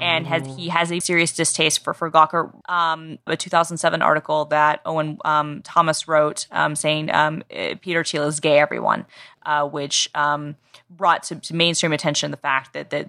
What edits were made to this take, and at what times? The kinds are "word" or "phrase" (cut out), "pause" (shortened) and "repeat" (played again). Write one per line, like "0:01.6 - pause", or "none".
0:01.0 - word
0:02.6 - word
0:03.3 - phrase